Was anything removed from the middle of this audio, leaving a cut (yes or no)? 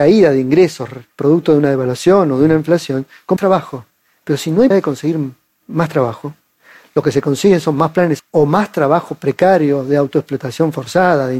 yes